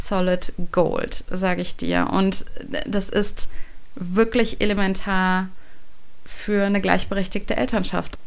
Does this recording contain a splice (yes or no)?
no